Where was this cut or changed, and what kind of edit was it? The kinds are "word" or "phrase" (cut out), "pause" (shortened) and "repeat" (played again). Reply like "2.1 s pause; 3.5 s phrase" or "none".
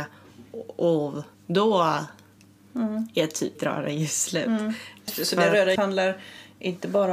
1.3 s pause; 3.6 s word; 5.8 s word